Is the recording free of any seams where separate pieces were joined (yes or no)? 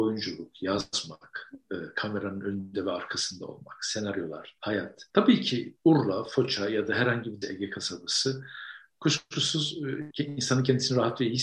yes